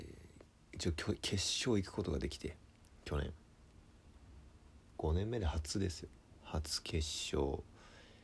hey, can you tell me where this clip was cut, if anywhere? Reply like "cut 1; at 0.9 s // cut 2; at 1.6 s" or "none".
cut 1; at 6.4 s